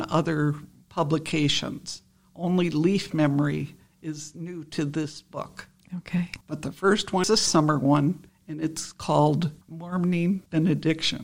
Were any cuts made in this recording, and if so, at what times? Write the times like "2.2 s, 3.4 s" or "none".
6.4 s, 7.2 s, 9.6 s